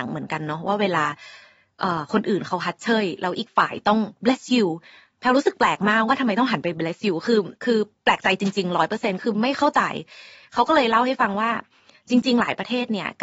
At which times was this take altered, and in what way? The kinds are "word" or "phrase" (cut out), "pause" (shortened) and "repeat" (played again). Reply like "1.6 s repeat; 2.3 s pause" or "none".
7.6 s pause